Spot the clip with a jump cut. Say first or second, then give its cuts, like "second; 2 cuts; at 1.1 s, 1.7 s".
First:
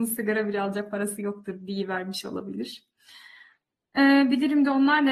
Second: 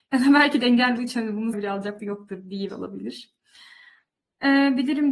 second; 4 cuts; at 1.0 s, 1.5 s, 2.0 s, 2.7 s